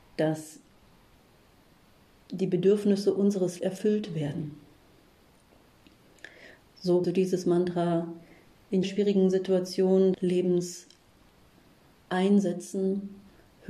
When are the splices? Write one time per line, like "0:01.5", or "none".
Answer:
0:03.6
0:07.0
0:08.8
0:10.1